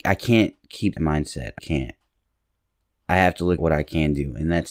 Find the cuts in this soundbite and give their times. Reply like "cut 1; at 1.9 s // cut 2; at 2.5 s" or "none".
cut 1; at 1.0 s // cut 2; at 1.6 s // cut 3; at 3.6 s